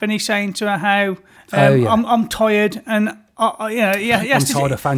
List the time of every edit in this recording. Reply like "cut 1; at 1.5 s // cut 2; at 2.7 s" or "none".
cut 1; at 1.4 s